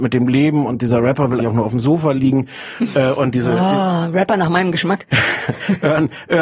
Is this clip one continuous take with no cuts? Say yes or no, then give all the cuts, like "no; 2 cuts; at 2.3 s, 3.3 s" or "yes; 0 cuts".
no; 1 cut; at 1.4 s